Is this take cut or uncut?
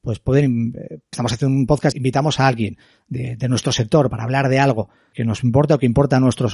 cut